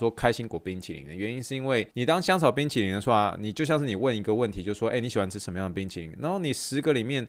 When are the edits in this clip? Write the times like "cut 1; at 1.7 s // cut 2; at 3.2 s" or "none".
cut 1; at 1.9 s